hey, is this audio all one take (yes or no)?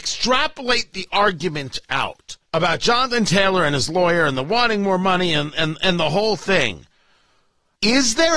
no